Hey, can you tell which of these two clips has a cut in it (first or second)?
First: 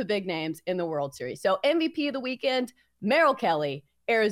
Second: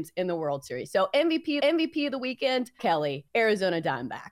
second